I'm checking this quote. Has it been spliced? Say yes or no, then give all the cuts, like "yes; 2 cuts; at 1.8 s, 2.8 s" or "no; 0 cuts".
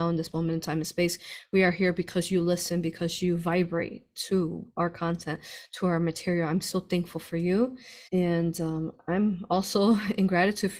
yes; 1 cut; at 8.1 s